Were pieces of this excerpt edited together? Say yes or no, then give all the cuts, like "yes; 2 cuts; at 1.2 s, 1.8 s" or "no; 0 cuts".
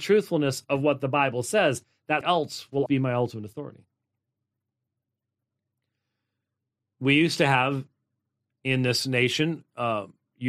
yes; 2 cuts; at 2.2 s, 2.9 s